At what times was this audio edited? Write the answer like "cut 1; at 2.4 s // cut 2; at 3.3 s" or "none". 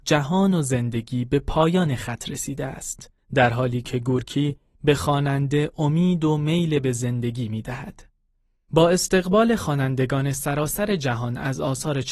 none